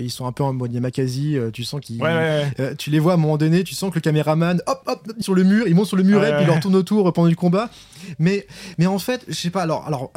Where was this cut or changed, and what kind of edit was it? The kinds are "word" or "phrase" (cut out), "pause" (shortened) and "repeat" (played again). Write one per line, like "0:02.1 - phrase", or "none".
0:04.8 - word
0:05.2 - word